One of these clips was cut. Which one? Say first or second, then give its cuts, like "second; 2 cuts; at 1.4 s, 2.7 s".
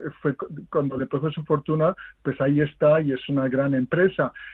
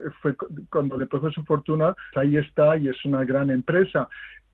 second; 1 cut; at 2.1 s